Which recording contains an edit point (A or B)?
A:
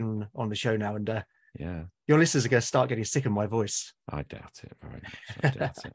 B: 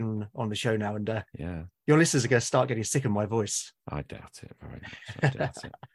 B